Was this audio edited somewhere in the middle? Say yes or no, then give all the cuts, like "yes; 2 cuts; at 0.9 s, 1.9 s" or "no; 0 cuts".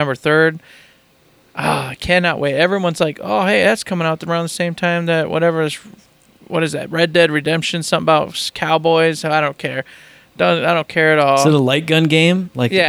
no; 0 cuts